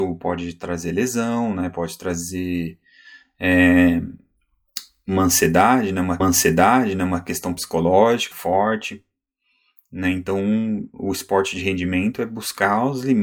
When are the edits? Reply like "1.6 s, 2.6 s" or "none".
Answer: 6.2 s, 8.3 s